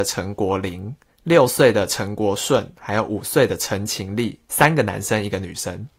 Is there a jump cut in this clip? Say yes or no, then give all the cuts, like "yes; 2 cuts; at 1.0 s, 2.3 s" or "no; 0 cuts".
yes; 1 cut; at 1.1 s